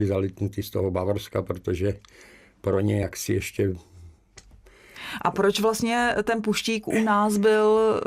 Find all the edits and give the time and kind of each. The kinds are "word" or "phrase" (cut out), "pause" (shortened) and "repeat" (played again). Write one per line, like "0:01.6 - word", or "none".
none